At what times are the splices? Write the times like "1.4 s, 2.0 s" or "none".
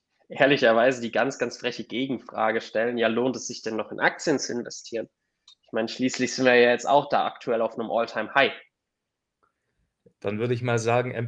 none